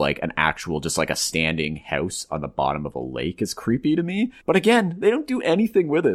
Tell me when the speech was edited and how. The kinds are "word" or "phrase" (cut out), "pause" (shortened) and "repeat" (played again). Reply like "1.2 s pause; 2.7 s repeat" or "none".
4.4 s pause